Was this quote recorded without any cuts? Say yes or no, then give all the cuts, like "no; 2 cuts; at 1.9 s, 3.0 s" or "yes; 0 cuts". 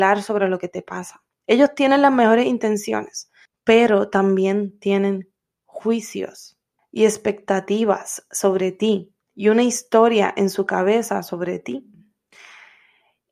no; 3 cuts; at 3.5 s, 6.8 s, 9.2 s